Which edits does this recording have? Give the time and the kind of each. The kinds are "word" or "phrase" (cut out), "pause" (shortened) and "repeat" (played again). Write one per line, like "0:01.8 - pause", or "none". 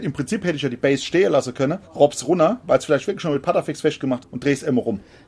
0:01.8 - pause
0:04.2 - word